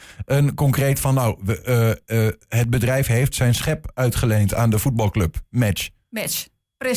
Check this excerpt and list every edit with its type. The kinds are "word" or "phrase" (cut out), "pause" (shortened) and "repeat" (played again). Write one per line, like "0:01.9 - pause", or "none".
0:02.4 - pause